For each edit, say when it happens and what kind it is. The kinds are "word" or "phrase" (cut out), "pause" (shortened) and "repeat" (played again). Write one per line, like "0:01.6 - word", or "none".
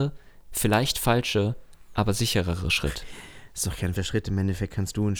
0:04.0 - word